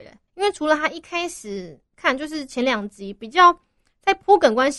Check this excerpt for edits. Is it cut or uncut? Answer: uncut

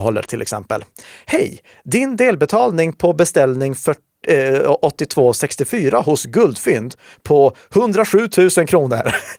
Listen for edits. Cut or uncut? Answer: uncut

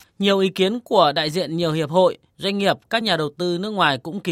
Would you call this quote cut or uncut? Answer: uncut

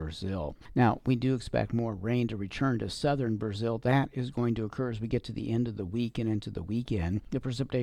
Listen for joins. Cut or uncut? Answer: uncut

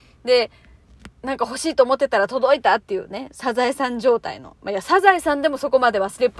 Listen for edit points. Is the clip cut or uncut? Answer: uncut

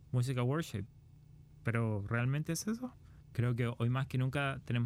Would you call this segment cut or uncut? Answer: uncut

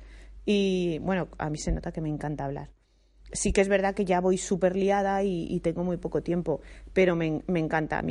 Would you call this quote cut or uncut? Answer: uncut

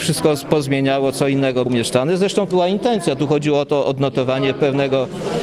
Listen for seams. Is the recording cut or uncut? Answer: cut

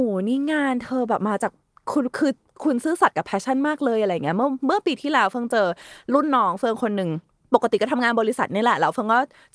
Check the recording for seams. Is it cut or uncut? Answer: uncut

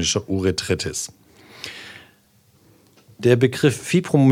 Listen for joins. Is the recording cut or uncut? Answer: uncut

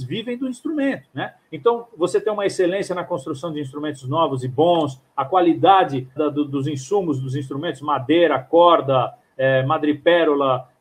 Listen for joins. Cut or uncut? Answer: cut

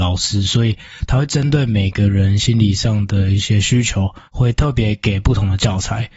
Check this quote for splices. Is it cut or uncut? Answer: cut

